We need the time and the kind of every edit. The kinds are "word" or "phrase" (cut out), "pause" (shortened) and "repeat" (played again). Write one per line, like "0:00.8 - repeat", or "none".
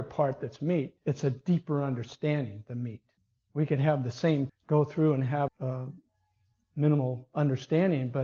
0:01.0 - pause
0:03.2 - pause
0:04.5 - word
0:05.5 - word